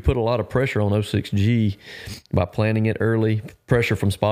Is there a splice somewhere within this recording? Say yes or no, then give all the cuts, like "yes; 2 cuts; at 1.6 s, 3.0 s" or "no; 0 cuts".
no; 0 cuts